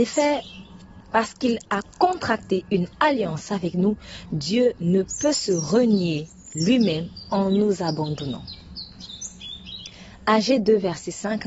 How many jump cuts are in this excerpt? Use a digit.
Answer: 1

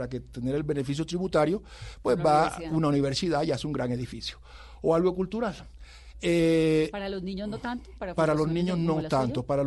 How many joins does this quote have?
0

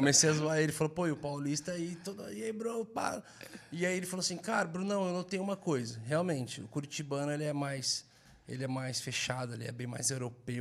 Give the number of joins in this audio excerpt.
0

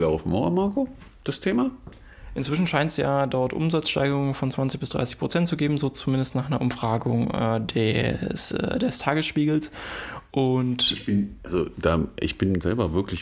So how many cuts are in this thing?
0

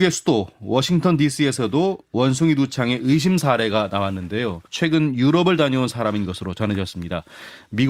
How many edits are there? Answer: 1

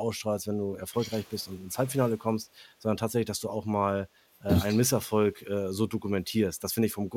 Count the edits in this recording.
0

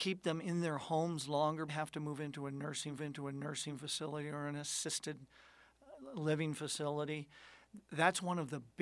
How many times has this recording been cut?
2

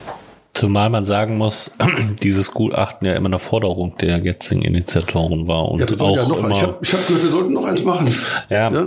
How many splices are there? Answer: 0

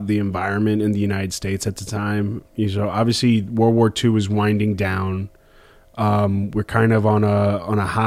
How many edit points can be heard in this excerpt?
0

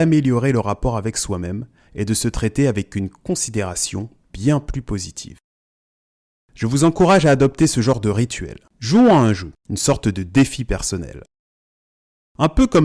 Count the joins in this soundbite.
2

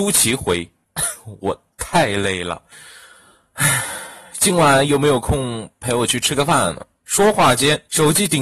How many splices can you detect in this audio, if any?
2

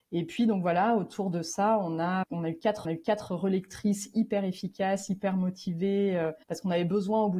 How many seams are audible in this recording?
3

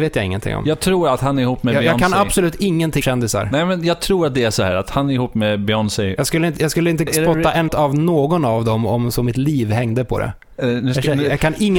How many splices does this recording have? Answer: 3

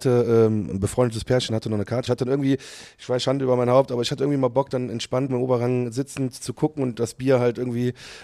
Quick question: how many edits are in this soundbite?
2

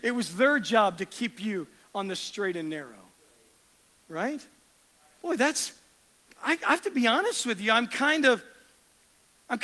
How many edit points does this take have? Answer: 0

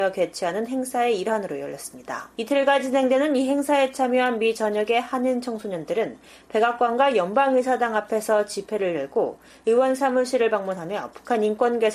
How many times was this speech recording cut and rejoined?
1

